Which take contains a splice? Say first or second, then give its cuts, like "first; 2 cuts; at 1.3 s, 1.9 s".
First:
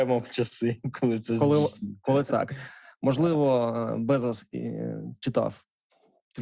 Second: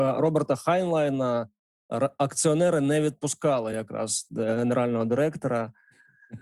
first; 1 cut; at 2.3 s